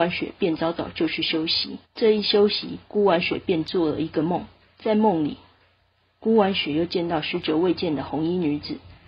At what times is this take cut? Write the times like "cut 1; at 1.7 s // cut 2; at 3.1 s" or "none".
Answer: cut 1; at 1.8 s